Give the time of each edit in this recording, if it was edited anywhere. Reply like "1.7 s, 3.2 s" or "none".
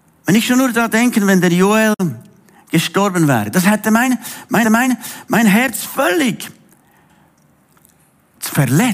4.6 s